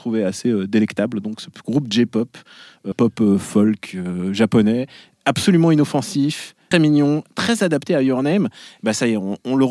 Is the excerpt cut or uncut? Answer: cut